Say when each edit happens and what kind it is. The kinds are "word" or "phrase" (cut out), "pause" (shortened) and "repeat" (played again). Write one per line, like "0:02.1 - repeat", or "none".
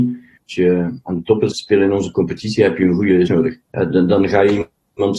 0:01.5 - word
0:03.3 - word
0:03.6 - pause